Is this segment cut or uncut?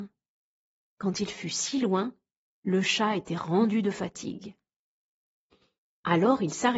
uncut